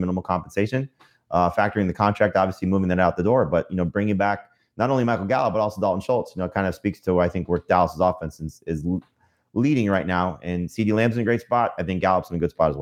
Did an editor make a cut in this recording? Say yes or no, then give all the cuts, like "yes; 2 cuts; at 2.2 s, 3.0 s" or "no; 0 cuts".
no; 0 cuts